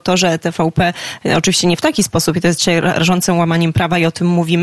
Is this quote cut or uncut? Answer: uncut